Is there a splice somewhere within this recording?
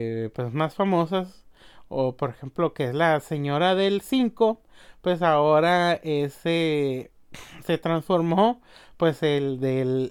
no; 0 cuts

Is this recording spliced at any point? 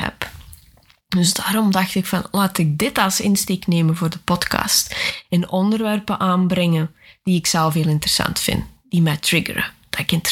no; 0 cuts

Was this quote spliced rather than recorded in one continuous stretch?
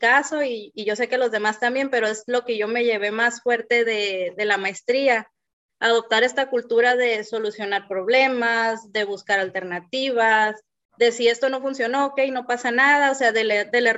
no; 0 cuts

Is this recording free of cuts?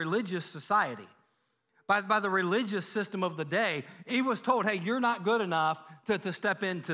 yes; 0 cuts

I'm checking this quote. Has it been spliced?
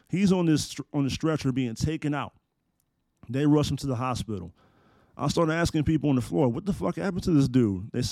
no; 0 cuts

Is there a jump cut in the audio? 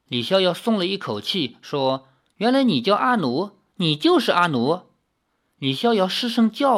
no; 0 cuts

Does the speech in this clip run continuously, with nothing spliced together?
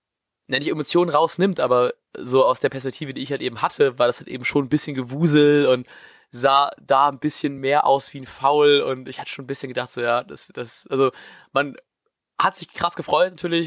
yes; 0 cuts

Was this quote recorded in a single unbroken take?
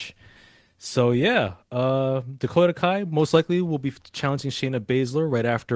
yes; 0 cuts

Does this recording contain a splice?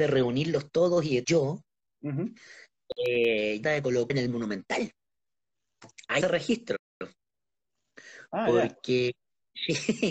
yes; 4 cuts; at 1.2 s, 3.6 s, 4.1 s, 6.2 s

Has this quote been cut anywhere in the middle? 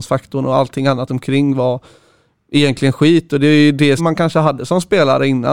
yes; 2 cuts; at 1.1 s, 4.0 s

